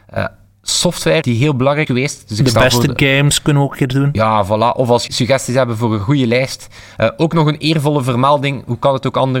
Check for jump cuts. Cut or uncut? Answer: cut